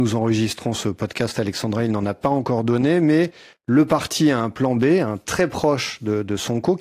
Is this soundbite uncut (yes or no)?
yes